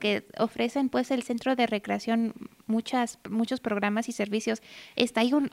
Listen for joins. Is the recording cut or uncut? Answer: uncut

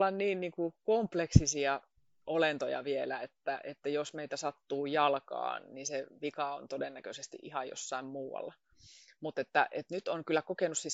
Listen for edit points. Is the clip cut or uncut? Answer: uncut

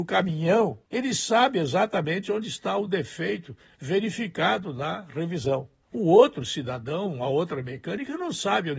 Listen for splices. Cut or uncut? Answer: uncut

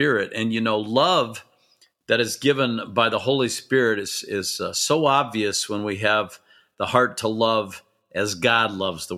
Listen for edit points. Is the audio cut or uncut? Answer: uncut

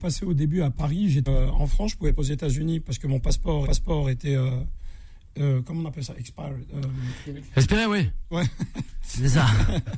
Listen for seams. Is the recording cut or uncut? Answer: cut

